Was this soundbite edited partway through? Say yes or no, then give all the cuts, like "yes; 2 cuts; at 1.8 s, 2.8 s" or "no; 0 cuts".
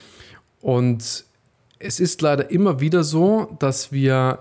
no; 0 cuts